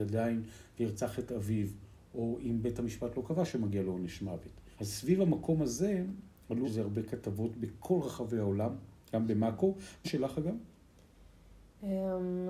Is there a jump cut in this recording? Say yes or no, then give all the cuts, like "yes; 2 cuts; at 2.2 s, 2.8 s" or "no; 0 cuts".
yes; 3 cuts; at 4.7 s, 6.6 s, 10.0 s